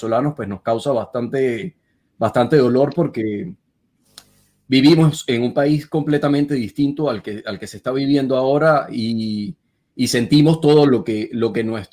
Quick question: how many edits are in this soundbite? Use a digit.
0